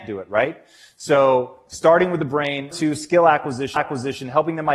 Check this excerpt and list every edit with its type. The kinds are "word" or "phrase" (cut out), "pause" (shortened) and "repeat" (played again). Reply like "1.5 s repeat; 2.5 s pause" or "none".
2.7 s word; 3.8 s repeat

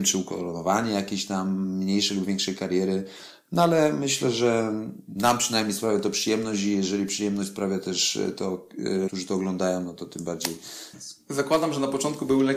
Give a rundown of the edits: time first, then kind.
5.0 s pause; 9.1 s word; 10.9 s phrase

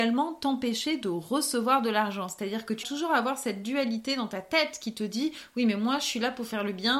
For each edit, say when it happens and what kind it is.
2.8 s word

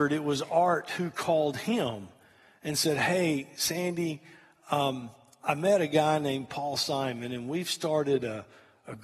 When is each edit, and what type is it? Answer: none

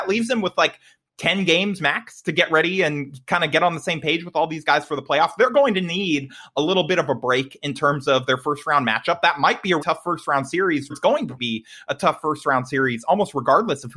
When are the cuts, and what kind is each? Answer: 9.8 s word; 10.9 s word; 11.4 s word

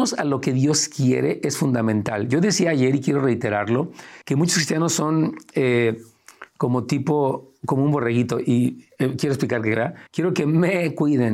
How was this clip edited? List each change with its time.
4.2 s pause; 10.1 s pause

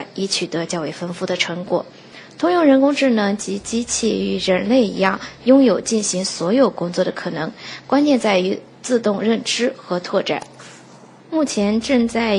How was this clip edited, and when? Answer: none

